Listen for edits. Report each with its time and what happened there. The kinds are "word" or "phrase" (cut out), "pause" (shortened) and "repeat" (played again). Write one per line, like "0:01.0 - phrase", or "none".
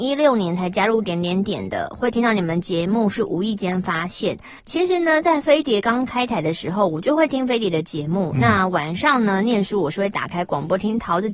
0:04.6 - pause